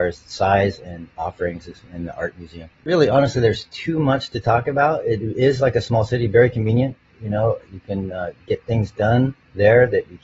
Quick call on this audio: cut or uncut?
cut